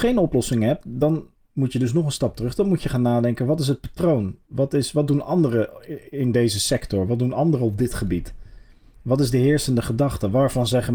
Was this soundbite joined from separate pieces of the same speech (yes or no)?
no